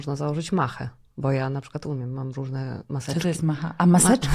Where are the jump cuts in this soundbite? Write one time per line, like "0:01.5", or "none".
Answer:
none